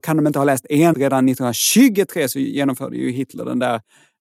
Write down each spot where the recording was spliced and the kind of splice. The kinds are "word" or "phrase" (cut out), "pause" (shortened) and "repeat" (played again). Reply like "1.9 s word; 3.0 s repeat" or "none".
0.9 s phrase